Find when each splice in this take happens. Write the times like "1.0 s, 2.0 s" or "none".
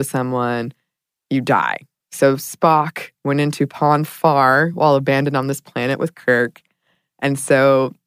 none

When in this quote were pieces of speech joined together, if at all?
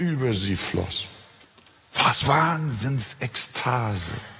2.2 s

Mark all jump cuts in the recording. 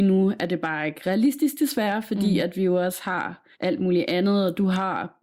3.5 s

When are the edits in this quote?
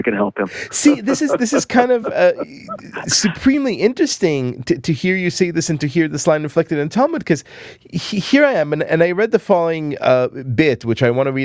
none

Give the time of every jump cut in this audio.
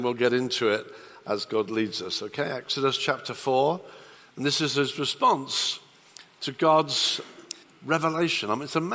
4.2 s, 7.6 s

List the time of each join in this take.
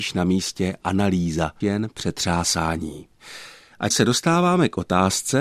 1.6 s, 3.9 s

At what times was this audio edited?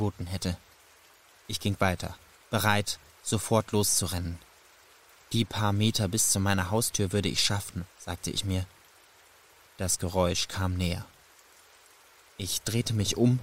7.9 s

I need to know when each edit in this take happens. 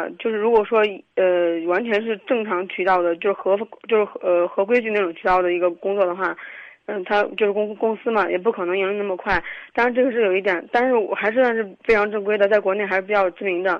none

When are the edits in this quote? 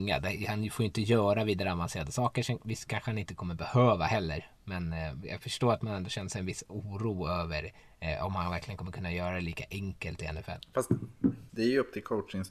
7.8 s, 11.5 s

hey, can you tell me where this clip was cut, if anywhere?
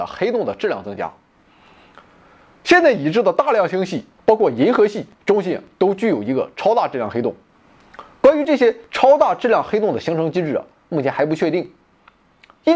5.1 s

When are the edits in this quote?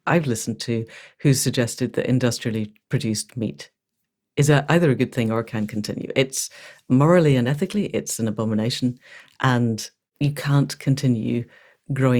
none

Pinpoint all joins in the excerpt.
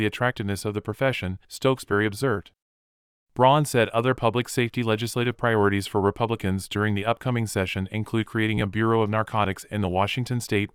1.4 s

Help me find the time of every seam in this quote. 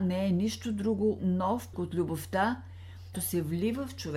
1.2 s, 1.7 s, 3.1 s

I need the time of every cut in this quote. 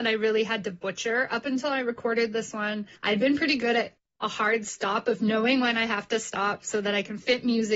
3.0 s

